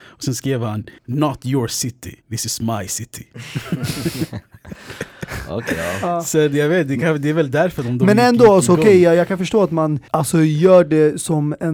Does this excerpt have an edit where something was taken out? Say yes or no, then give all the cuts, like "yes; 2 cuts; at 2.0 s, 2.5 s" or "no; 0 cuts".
yes; 3 cuts; at 1.0 s, 2.2 s, 10.1 s